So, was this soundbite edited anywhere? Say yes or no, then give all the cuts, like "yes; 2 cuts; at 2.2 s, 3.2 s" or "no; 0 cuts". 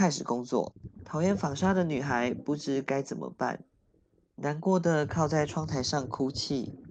no; 0 cuts